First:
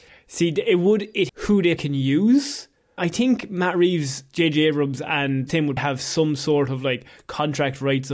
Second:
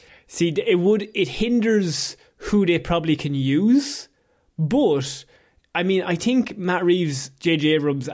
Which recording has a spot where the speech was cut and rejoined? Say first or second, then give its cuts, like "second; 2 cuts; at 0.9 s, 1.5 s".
first; 5 cuts; at 1.3 s, 1.8 s, 3.0 s, 5.5 s, 5.8 s